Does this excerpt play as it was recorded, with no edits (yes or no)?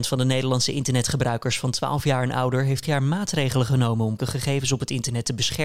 no